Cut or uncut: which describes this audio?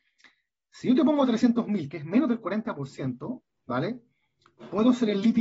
uncut